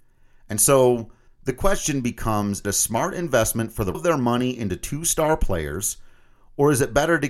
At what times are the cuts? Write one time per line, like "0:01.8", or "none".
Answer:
0:01.3
0:02.6
0:03.9